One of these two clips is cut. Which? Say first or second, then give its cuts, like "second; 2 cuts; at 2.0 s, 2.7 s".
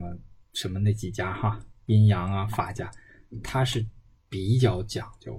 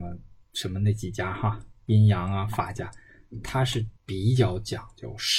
second; 1 cut; at 4.0 s